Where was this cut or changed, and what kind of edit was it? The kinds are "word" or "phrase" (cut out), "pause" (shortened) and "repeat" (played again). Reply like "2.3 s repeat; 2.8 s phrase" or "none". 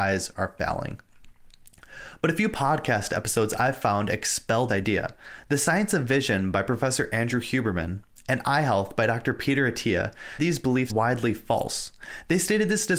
4.7 s word; 10.4 s word; 10.9 s word